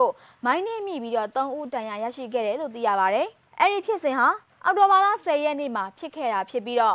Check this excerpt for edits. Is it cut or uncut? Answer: uncut